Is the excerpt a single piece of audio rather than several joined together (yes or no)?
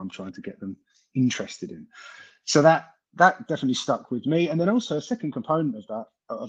yes